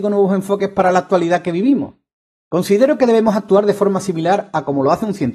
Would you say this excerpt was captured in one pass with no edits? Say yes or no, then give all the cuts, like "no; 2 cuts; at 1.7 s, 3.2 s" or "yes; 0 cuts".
yes; 0 cuts